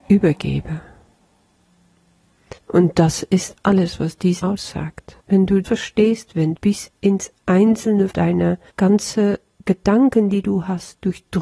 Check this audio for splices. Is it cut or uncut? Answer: cut